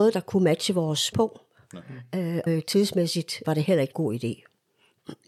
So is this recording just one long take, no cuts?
no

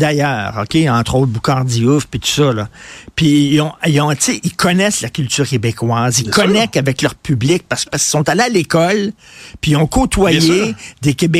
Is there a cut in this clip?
yes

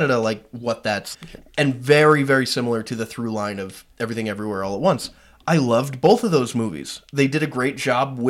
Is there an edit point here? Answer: yes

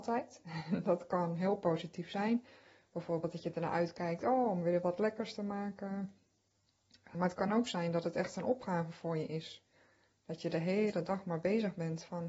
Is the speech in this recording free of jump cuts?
yes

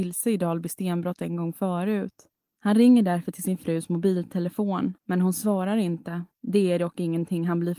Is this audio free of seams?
no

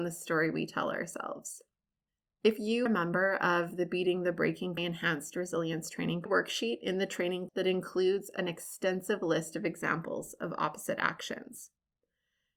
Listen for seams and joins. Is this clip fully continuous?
no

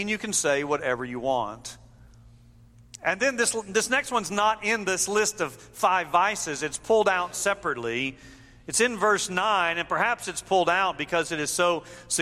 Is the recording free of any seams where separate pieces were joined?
yes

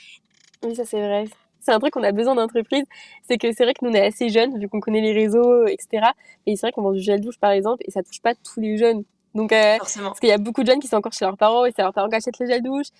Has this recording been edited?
no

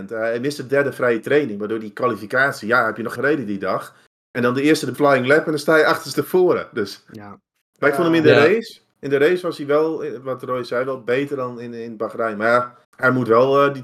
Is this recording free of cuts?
no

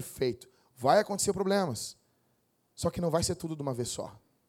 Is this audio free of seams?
yes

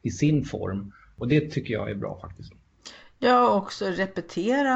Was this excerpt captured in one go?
yes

